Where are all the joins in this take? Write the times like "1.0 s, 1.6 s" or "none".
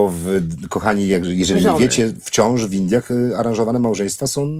none